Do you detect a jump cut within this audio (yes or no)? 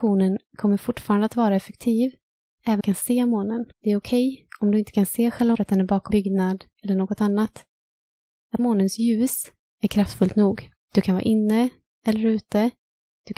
yes